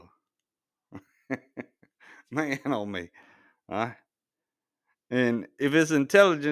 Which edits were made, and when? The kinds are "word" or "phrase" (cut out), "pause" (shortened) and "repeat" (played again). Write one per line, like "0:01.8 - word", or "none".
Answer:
none